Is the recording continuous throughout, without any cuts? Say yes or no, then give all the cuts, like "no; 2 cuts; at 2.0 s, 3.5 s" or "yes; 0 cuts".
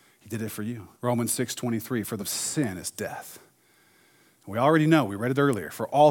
no; 2 cuts; at 0.9 s, 2.2 s